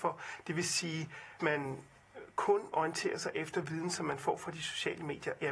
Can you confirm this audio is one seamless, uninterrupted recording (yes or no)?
no